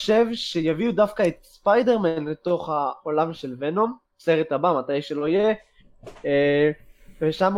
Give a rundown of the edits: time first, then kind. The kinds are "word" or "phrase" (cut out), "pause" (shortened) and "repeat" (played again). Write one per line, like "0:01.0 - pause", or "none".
0:04.1 - pause